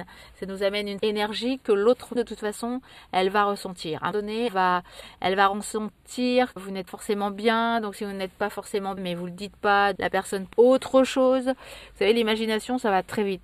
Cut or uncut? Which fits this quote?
cut